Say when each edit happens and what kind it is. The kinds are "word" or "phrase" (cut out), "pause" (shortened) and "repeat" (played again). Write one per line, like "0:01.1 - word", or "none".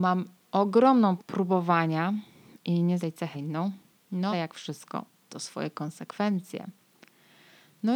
0:01.2 - word
0:03.0 - word
0:03.3 - word
0:04.3 - word
0:05.3 - word